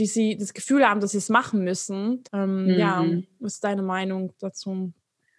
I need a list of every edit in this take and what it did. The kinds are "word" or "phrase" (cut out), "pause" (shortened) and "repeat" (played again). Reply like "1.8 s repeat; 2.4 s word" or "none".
2.3 s pause